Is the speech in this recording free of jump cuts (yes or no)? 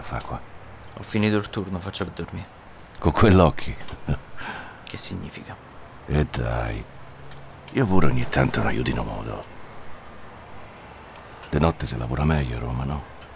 no